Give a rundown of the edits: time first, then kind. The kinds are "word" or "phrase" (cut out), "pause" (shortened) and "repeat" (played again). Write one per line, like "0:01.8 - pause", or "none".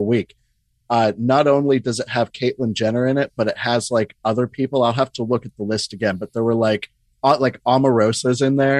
none